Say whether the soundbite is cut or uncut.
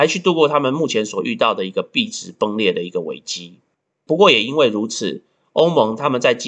cut